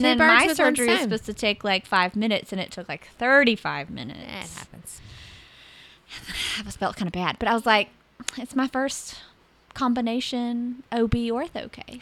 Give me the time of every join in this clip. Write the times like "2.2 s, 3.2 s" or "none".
none